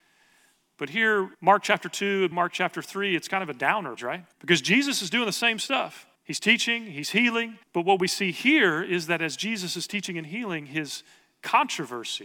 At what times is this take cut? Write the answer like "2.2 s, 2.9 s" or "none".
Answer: 1.3 s, 2.3 s, 4.0 s, 4.3 s, 6.1 s, 7.6 s